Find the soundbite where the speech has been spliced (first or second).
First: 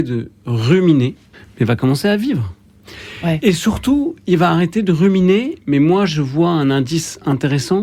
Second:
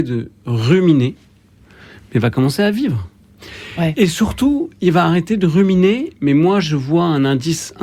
first